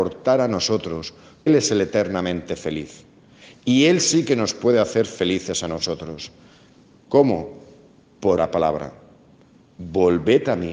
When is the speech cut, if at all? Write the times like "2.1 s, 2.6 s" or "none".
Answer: 1.5 s, 8.4 s